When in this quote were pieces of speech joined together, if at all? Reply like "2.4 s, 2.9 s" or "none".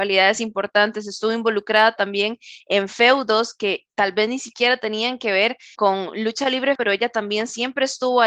5.8 s, 6.8 s